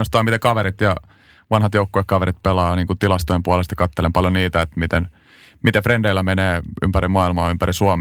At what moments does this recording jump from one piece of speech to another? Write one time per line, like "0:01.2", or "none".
none